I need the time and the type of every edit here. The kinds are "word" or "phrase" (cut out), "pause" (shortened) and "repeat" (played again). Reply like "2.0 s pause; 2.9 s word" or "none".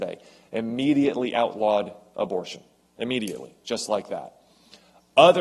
none